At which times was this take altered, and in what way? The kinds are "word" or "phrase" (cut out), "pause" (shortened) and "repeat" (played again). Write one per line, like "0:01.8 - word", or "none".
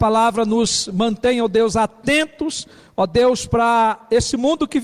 none